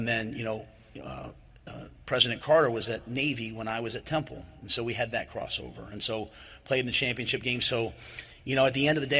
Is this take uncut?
yes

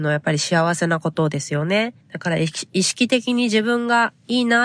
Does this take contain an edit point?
yes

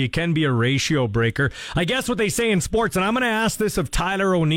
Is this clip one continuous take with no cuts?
yes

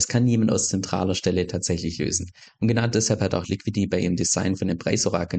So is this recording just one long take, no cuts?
yes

